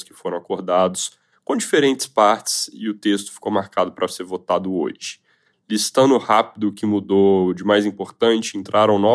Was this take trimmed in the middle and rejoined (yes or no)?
no